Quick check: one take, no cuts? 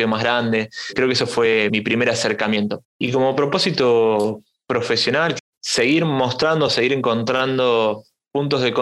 yes; 0 cuts

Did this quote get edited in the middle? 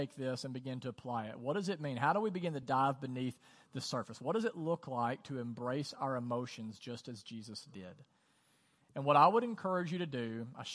no; 0 cuts

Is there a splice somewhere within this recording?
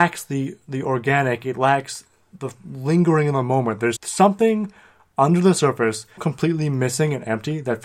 yes; 2 cuts; at 4.0 s, 6.2 s

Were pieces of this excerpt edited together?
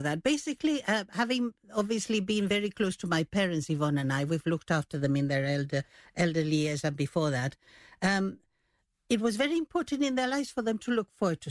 no; 0 cuts

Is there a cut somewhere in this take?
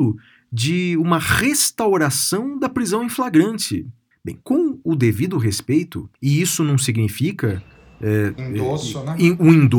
yes; 3 cuts; at 4.1 s, 6.1 s, 8.4 s

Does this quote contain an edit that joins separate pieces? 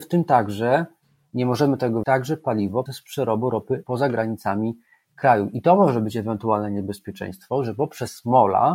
yes; 3 cuts; at 2.0 s, 2.9 s, 3.8 s

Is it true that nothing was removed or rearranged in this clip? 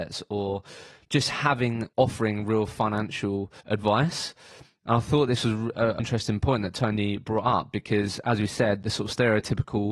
no; 4 cuts; at 1.9 s, 3.6 s, 6.0 s, 8.8 s

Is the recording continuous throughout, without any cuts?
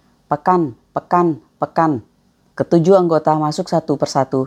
yes; 0 cuts

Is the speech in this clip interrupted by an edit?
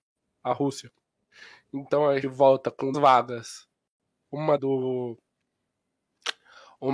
yes; 3 cuts; at 2.2 s, 2.9 s, 4.6 s

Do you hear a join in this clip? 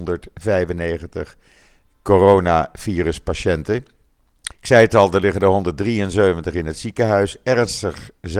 yes; 1 cut; at 4.5 s

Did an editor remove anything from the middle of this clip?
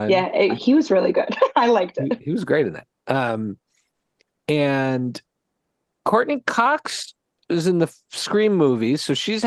no; 0 cuts

